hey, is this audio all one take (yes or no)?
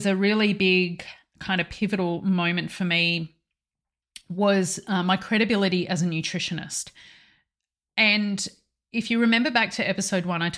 yes